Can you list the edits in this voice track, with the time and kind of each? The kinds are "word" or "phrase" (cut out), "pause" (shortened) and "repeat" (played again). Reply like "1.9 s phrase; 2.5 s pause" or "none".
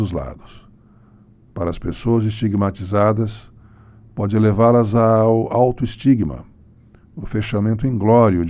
none